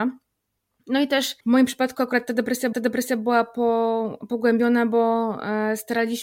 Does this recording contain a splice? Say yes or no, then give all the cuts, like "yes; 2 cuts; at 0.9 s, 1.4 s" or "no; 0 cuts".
yes; 2 cuts; at 1.4 s, 2.7 s